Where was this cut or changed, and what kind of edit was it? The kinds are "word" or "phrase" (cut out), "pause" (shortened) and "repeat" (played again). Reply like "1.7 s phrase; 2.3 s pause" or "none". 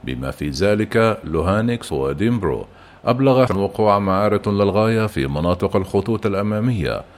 1.9 s word; 3.5 s phrase; 4.4 s word